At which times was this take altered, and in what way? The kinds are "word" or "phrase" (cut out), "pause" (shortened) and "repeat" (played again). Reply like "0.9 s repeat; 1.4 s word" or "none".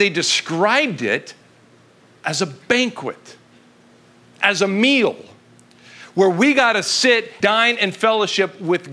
7.4 s word